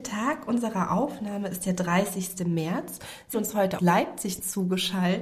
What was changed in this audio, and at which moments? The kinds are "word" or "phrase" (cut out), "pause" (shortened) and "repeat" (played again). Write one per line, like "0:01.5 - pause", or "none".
0:03.3 - word
0:03.8 - word